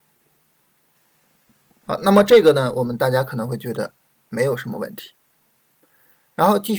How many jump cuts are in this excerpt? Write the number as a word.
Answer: one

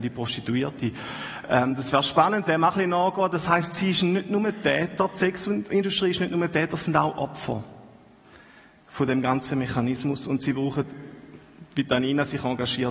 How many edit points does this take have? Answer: one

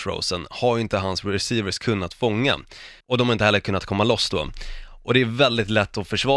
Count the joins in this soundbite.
one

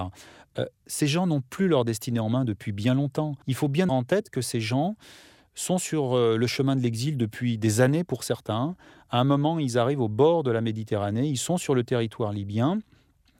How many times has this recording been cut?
two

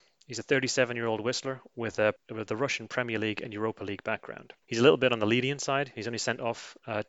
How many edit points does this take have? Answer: one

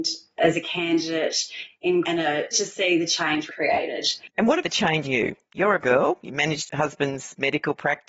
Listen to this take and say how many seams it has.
seven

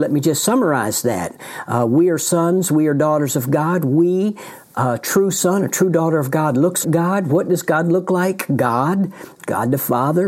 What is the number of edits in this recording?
one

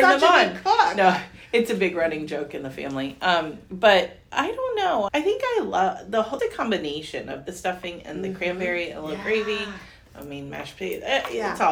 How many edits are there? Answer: three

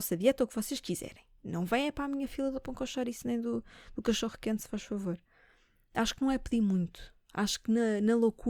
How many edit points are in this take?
zero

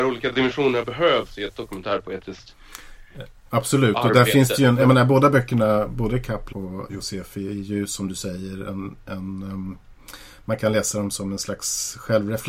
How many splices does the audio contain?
one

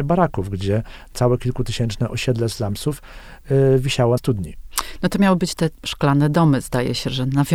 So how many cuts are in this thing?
two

